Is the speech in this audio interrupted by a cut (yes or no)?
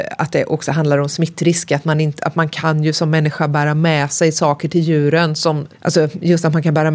no